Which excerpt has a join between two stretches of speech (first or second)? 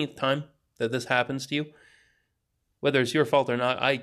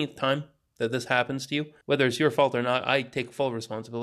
second